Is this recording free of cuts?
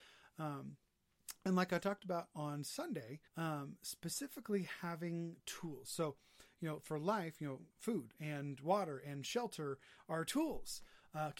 no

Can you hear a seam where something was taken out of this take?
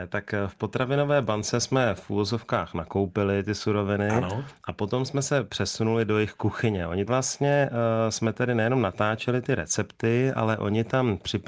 yes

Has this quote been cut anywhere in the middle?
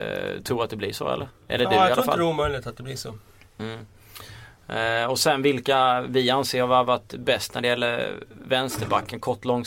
yes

